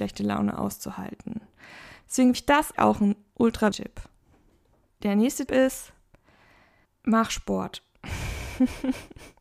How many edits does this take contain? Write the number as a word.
four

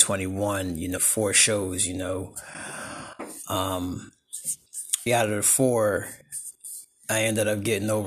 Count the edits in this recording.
two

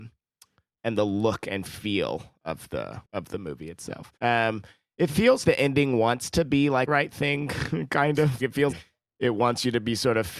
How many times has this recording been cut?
six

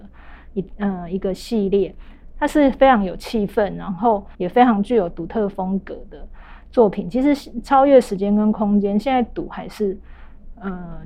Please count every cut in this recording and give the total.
one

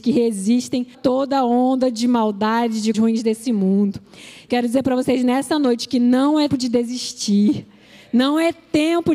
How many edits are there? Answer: four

